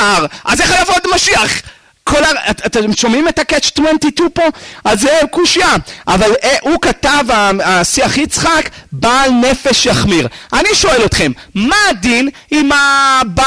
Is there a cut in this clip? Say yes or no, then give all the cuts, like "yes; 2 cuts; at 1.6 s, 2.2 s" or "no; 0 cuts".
no; 0 cuts